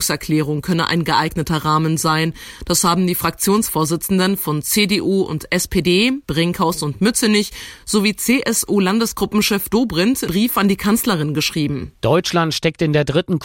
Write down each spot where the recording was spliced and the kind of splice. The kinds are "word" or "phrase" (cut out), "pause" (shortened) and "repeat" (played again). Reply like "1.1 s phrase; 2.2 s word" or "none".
6.2 s pause; 10.3 s word